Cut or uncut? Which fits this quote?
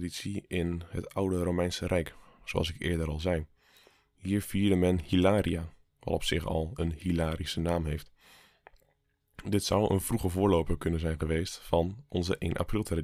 uncut